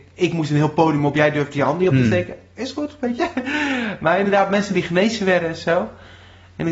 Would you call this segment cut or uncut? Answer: uncut